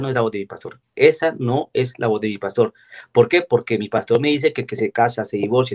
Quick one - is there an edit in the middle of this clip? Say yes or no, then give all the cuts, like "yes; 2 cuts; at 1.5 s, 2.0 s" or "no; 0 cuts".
no; 0 cuts